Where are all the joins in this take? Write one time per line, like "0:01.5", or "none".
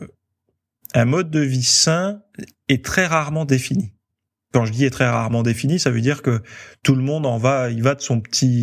none